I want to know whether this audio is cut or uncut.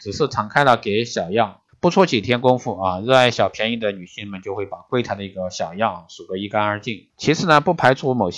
cut